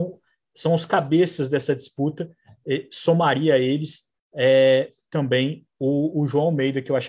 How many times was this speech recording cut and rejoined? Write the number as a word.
zero